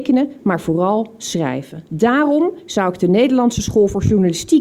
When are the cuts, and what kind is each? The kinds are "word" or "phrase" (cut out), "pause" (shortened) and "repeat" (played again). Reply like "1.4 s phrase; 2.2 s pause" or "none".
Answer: 1.9 s pause